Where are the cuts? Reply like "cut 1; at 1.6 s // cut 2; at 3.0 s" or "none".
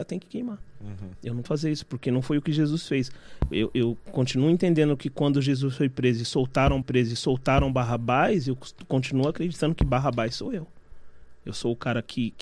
cut 1; at 1.5 s // cut 2; at 6.8 s